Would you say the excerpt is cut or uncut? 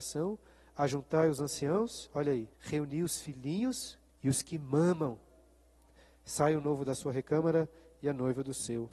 cut